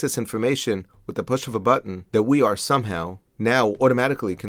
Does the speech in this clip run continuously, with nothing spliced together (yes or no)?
no